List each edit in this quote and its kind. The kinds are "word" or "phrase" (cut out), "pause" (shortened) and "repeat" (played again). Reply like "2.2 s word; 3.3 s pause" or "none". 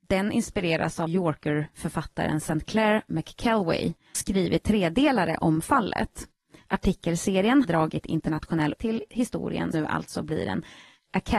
1.1 s word; 4.1 s word; 4.6 s word; 7.6 s word; 8.7 s word; 9.7 s word